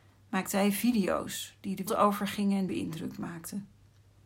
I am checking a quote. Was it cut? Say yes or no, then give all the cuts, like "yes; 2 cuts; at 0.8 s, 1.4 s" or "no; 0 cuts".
yes; 2 cuts; at 1.9 s, 2.7 s